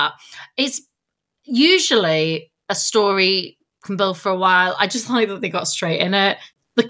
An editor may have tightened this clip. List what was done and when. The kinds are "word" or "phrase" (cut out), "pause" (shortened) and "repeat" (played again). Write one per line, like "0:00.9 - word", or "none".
none